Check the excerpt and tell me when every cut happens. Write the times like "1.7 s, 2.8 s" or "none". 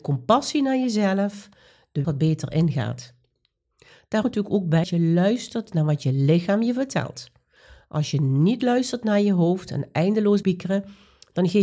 2.0 s, 4.2 s, 4.8 s, 10.4 s